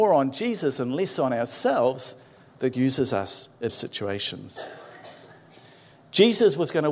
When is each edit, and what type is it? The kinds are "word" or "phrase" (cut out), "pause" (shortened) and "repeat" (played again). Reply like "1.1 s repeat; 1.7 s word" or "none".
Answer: 2.7 s word; 3.7 s word

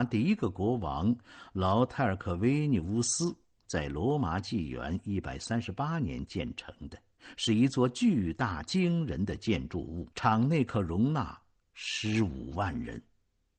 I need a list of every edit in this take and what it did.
10.1 s pause

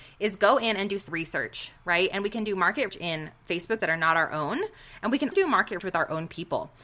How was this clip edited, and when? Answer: 1.1 s word; 2.9 s word; 3.8 s word; 5.3 s word; 5.8 s word

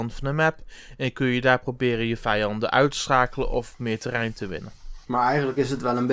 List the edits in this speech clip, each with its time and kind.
5.0 s pause

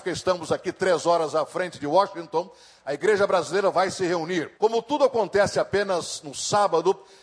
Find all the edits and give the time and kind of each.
4.6 s pause

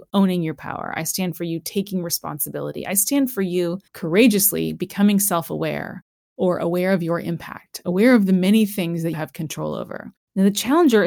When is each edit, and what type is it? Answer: 3.9 s pause; 9.1 s word

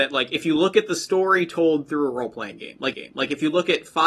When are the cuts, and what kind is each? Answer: 2.9 s repeat

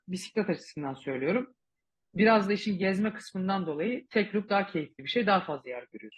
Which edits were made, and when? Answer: none

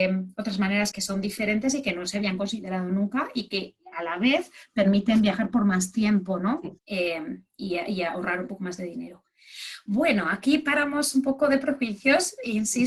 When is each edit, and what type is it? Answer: 0.9 s word; 6.8 s pause

